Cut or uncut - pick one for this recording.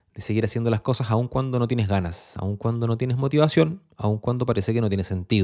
uncut